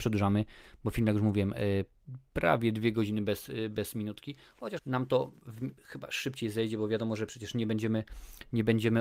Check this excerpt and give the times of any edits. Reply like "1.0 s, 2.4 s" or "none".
4.8 s